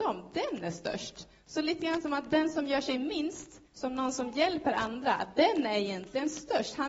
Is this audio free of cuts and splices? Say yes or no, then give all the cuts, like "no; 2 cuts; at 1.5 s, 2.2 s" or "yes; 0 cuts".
no; 1 cut; at 3.7 s